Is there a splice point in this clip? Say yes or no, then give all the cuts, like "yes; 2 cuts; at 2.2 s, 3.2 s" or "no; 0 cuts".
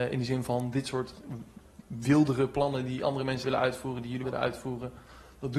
yes; 2 cuts; at 3.4 s, 4.2 s